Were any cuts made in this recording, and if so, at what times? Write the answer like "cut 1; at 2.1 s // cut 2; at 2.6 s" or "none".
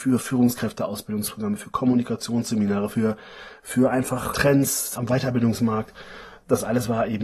none